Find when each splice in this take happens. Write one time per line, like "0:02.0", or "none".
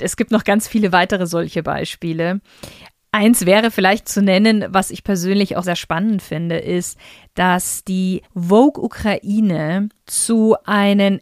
0:04.0
0:05.6
0:08.3